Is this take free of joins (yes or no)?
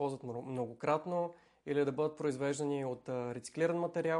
yes